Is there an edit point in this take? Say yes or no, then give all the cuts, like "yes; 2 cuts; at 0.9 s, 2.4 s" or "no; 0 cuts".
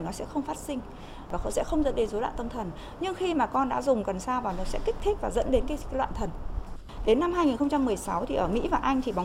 no; 0 cuts